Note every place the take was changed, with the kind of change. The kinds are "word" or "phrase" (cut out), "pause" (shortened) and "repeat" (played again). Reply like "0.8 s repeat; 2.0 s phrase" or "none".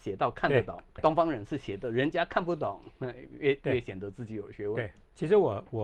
1.0 s word